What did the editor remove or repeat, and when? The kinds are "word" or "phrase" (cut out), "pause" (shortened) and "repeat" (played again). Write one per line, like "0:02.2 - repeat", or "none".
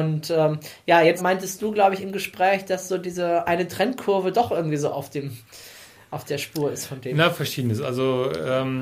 0:01.2 - word